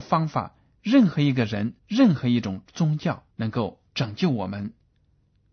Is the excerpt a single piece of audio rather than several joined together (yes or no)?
no